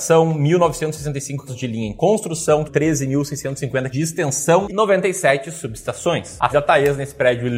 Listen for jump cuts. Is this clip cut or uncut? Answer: cut